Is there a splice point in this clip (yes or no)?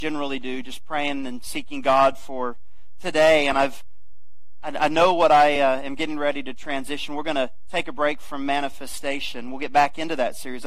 no